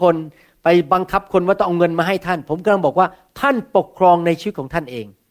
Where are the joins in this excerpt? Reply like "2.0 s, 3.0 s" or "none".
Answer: none